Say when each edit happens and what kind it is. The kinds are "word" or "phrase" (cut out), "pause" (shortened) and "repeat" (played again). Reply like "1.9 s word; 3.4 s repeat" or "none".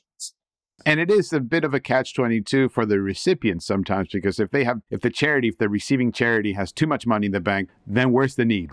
7.7 s word